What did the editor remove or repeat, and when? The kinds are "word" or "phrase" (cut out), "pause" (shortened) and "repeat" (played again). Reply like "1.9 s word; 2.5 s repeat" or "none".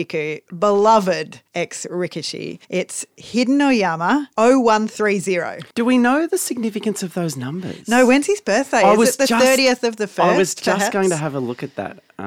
1.5 s pause; 2.6 s pause; 4.3 s pause; 5.7 s pause